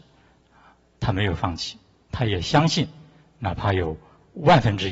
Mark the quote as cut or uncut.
cut